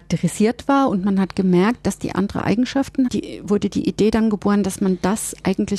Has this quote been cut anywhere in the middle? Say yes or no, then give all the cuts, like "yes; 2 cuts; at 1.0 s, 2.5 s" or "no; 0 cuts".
yes; 2 cuts; at 2.1 s, 3.1 s